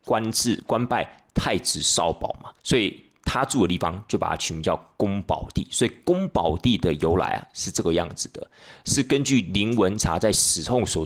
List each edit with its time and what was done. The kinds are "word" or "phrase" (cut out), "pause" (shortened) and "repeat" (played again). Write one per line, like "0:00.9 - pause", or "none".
0:02.6 - pause